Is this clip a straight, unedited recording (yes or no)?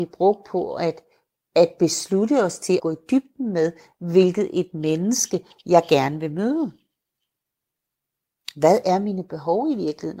no